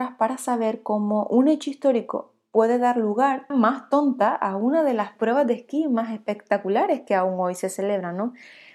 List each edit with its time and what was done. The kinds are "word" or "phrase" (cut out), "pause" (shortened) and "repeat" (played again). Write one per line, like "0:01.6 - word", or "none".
0:03.5 - phrase